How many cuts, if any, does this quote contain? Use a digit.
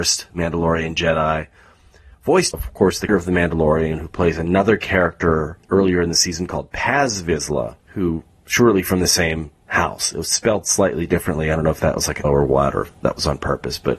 5